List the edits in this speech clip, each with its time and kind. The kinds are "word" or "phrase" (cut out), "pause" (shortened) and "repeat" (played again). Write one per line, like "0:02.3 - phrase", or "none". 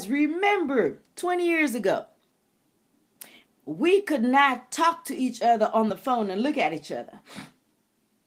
none